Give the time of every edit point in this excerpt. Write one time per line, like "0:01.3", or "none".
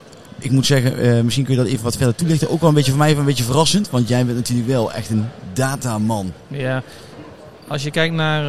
none